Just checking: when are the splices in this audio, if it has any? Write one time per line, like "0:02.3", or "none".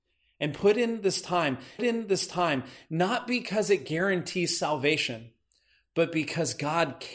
0:01.8